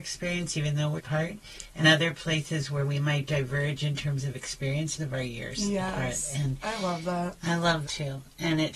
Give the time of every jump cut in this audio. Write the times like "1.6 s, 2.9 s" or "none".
1.0 s, 1.8 s, 5.0 s, 7.8 s